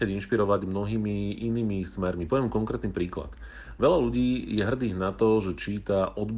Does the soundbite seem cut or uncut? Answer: uncut